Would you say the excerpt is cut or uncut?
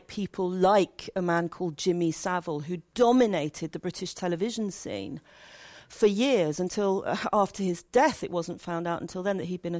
uncut